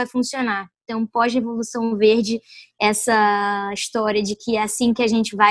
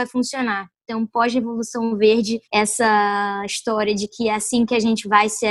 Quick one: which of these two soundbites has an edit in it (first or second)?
second